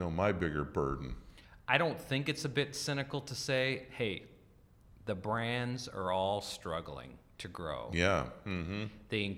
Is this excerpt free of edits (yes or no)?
yes